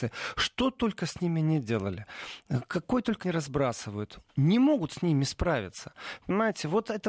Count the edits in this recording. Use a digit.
2